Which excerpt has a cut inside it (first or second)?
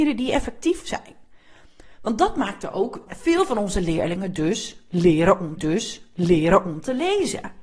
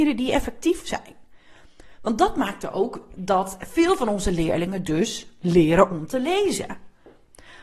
first